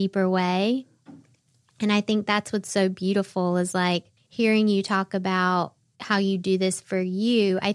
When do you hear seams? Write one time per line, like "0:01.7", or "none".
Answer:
0:04.2